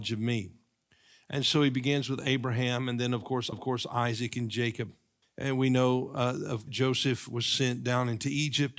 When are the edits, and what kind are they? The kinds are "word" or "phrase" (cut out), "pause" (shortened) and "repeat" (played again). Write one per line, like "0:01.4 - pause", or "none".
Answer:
0:03.5 - repeat
0:05.2 - pause
0:06.7 - word